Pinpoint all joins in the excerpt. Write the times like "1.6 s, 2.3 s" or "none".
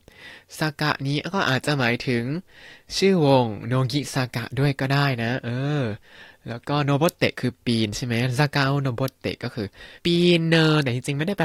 10.0 s

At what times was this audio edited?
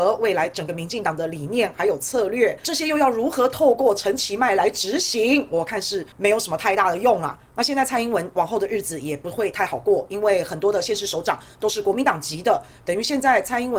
6.1 s

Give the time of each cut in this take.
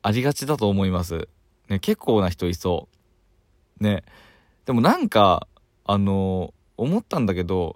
none

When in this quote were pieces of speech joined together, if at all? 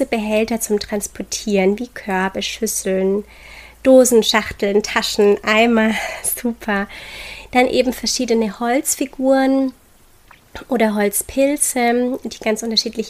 none

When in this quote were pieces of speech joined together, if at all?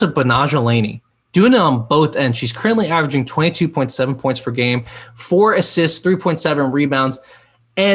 1.1 s

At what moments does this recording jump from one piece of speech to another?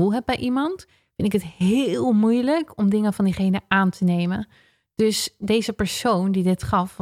none

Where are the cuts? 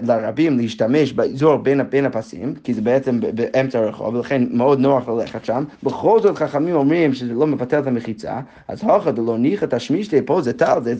none

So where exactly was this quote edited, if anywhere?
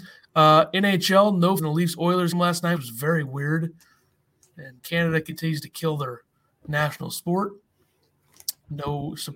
1.6 s, 2.3 s, 2.8 s, 4.8 s

